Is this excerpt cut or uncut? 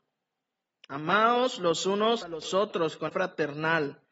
cut